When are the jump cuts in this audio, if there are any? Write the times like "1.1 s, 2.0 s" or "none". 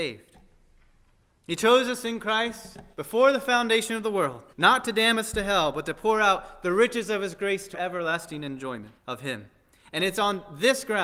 2.9 s, 4.5 s, 7.7 s, 9.0 s